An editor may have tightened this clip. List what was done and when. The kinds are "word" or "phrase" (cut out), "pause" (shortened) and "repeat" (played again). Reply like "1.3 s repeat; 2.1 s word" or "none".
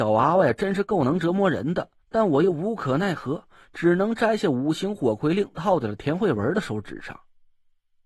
2.0 s pause

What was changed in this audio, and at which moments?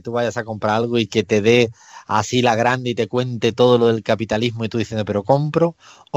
none

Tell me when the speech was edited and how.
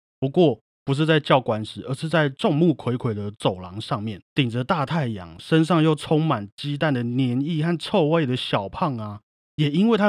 4.3 s pause

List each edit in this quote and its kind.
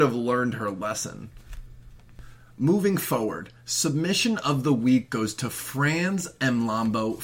none

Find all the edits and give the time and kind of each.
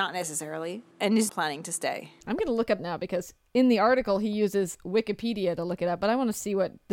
0.9 s pause; 1.3 s word; 2.2 s pause; 2.8 s word

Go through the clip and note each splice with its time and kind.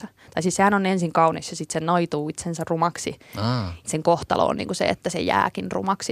3.8 s word

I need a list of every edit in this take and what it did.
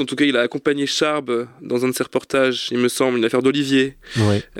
none

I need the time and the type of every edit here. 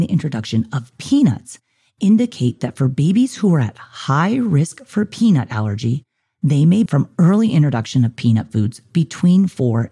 6.9 s word

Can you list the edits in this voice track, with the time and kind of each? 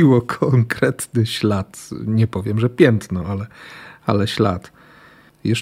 none

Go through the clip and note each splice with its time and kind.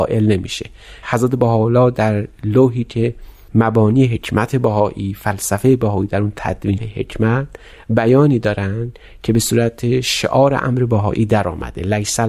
1.0 s word; 6.8 s phrase

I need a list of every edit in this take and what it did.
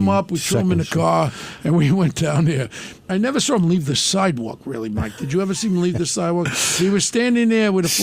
none

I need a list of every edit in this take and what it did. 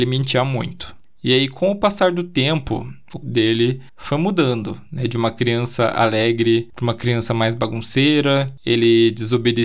3.2 s word

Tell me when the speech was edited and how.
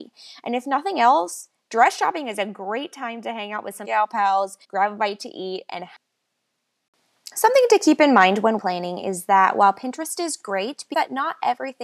3.8 s phrase; 4.6 s pause; 8.6 s word; 10.9 s word

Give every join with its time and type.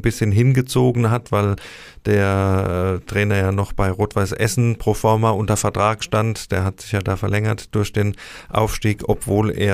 none

